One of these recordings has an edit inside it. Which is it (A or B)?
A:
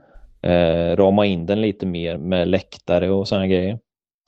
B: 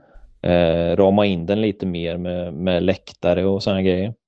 A